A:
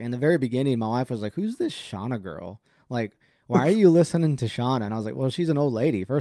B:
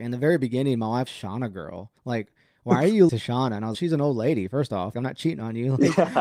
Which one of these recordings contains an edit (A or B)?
B